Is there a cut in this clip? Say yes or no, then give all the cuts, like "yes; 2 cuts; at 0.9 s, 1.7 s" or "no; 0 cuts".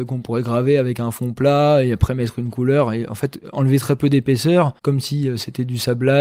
yes; 1 cut; at 4.8 s